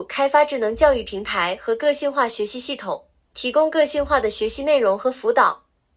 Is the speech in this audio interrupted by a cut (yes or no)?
no